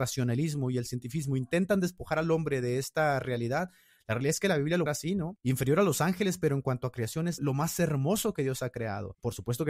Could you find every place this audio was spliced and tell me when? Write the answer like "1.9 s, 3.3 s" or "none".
4.9 s, 7.4 s